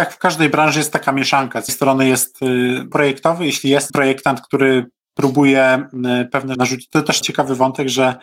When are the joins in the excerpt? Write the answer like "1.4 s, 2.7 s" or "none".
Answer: 1.7 s, 2.9 s, 3.9 s, 6.5 s, 7.2 s